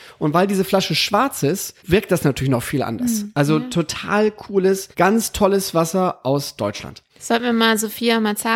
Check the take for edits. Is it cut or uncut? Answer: cut